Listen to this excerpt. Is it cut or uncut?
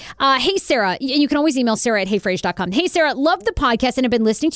uncut